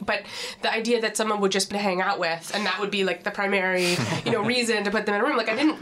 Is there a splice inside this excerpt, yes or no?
yes